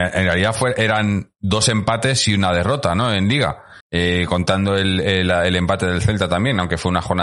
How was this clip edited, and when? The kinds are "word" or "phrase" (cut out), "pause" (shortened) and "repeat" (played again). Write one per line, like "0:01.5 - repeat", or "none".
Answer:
0:03.8 - pause